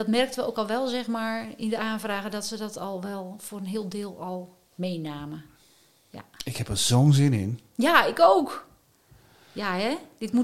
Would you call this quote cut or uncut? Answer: uncut